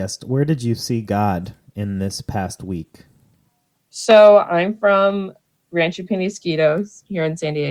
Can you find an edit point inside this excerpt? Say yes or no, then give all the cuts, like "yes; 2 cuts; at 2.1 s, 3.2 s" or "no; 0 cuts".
no; 0 cuts